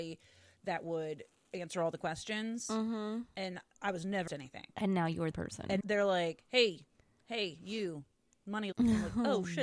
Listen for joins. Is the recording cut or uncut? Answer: cut